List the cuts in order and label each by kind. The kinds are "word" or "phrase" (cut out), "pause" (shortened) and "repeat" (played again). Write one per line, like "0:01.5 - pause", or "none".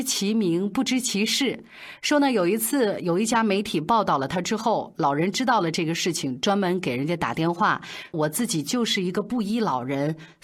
0:08.1 - phrase